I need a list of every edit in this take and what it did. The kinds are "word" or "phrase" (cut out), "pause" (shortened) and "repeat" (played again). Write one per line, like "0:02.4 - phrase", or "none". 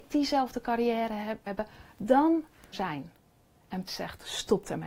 0:01.5 - word
0:02.7 - phrase
0:03.9 - word